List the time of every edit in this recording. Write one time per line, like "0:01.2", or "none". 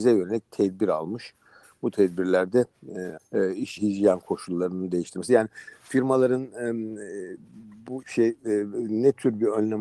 0:03.2
0:03.8
0:08.0